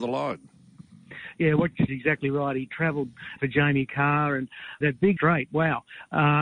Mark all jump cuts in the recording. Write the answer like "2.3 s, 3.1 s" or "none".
1.9 s, 3.4 s, 4.8 s, 5.2 s